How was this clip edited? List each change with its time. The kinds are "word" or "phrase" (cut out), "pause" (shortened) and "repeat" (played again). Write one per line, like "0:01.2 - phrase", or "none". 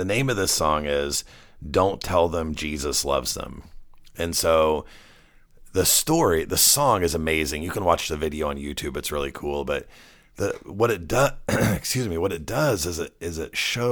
none